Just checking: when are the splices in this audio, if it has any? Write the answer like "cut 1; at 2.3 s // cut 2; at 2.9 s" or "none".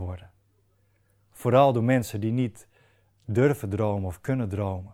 none